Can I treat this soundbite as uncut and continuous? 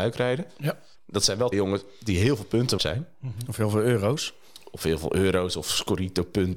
no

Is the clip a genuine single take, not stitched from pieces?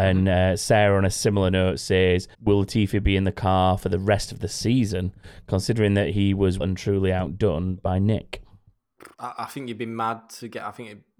no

